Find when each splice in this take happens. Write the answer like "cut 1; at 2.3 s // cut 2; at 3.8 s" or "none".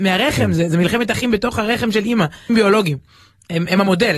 cut 1; at 2.5 s